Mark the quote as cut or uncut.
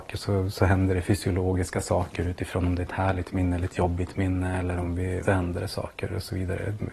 cut